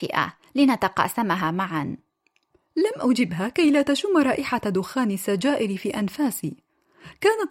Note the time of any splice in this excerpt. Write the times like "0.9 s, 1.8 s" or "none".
none